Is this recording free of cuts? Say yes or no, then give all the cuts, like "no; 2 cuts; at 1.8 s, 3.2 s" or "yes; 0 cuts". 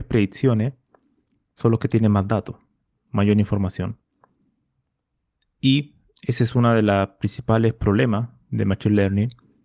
yes; 0 cuts